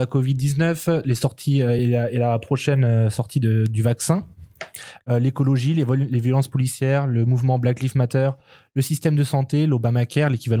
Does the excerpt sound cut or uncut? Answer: uncut